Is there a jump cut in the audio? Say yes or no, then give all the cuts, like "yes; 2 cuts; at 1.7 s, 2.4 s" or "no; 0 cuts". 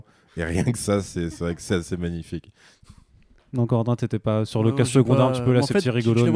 no; 0 cuts